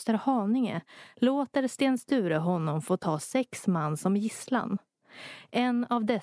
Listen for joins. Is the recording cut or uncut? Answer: uncut